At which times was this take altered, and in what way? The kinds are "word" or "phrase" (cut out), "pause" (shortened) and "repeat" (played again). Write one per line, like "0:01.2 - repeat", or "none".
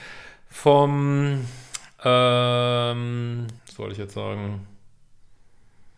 0:03.6 - pause